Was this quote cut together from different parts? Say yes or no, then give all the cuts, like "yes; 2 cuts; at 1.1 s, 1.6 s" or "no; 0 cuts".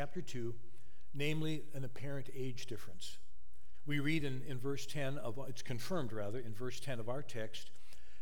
no; 0 cuts